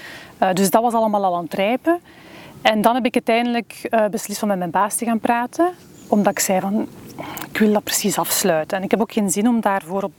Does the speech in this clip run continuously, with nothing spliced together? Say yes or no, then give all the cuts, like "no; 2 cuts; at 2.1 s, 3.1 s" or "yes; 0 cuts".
yes; 0 cuts